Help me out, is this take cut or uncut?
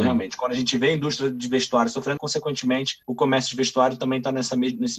cut